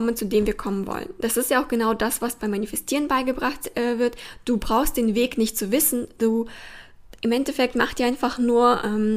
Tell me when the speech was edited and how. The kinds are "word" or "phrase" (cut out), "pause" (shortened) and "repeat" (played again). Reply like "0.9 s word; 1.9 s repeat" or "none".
none